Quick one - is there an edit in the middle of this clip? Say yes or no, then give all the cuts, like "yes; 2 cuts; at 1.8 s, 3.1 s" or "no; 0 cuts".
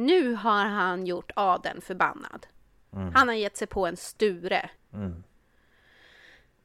yes; 1 cut; at 4.8 s